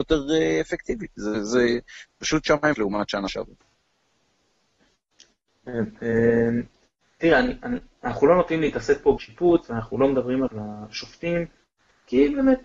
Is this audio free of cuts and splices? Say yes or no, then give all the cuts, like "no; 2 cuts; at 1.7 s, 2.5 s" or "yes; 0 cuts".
no; 3 cuts; at 2.7 s, 9.2 s, 10.5 s